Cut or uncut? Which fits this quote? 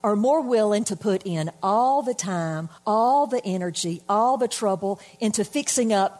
cut